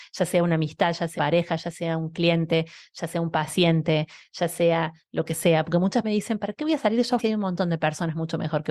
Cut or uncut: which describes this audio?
cut